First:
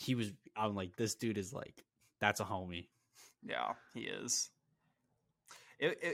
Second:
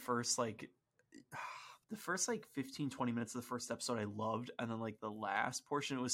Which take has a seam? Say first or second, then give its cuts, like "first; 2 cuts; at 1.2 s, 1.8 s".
second; 1 cut; at 1.8 s